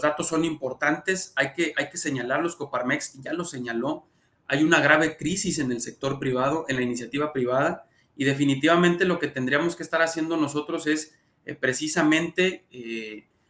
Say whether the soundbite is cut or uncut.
uncut